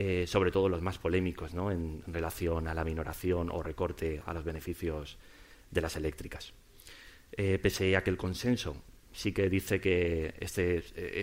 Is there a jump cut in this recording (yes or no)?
no